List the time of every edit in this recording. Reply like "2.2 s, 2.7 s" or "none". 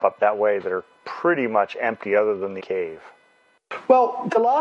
1.0 s, 2.6 s